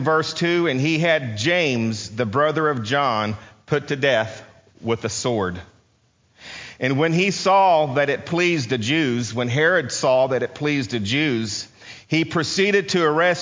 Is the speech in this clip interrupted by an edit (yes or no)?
no